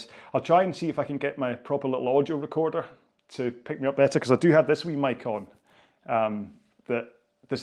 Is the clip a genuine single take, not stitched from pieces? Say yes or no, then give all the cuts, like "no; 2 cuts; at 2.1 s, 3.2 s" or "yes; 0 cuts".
yes; 0 cuts